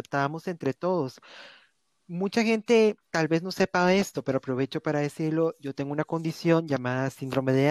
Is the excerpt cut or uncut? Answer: uncut